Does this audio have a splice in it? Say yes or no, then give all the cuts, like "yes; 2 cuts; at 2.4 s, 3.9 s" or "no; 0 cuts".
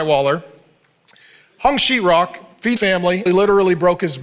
yes; 2 cuts; at 2.8 s, 3.3 s